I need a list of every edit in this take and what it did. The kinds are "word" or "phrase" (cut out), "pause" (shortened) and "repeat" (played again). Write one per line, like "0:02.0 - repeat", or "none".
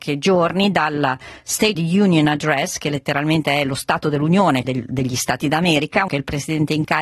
0:01.8 - word
0:04.6 - word
0:05.4 - word
0:06.1 - word

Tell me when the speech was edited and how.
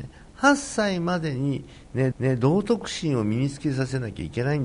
0:02.1 - repeat

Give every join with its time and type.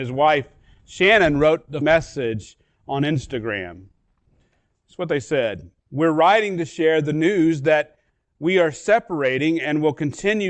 0:01.8 - word
0:05.8 - pause

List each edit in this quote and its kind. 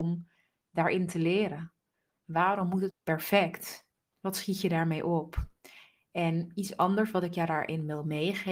0:02.9 - word
0:04.0 - pause

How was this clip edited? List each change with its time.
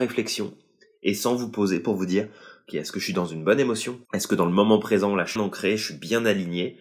0:04.0 - pause
0:05.4 - phrase

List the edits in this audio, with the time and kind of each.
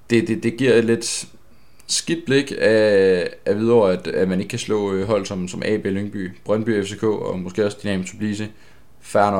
none

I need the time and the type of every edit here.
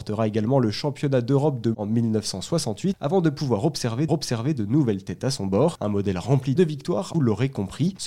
0:01.7 - word
0:04.1 - repeat
0:06.6 - phrase
0:07.1 - word

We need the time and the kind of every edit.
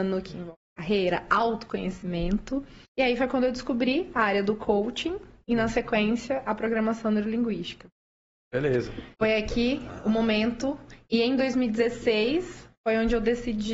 0:02.9 - pause
0:09.1 - pause

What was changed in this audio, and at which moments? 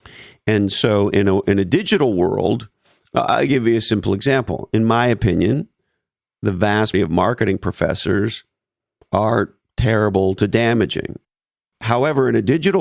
0:06.9 - word

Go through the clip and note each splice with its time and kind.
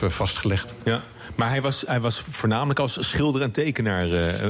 none

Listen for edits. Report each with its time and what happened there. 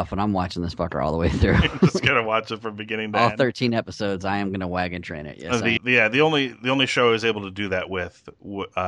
0:05.8 - word

